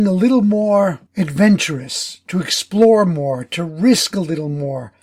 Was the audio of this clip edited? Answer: yes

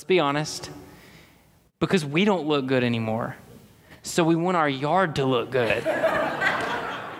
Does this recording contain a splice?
no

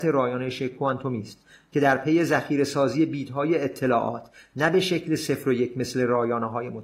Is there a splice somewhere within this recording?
no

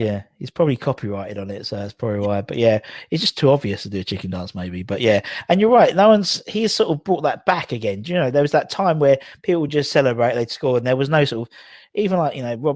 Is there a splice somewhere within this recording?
no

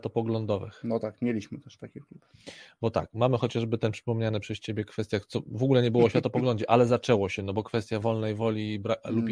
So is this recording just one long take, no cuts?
yes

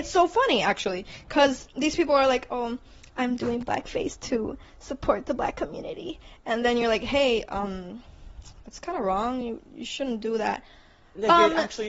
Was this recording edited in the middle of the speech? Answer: no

